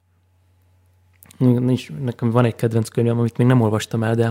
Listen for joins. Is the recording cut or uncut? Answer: uncut